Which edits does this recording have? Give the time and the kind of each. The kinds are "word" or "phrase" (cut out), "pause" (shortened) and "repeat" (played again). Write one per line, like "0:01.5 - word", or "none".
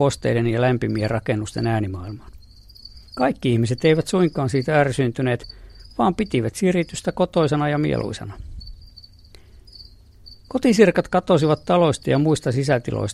0:03.1 - pause